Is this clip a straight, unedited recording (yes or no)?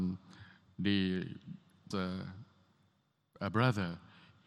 no